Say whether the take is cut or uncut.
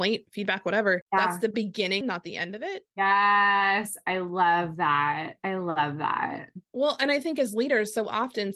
cut